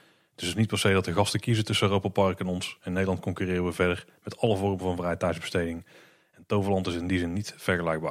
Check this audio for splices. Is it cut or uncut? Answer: uncut